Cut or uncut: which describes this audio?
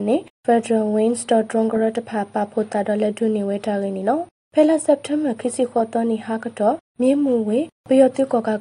uncut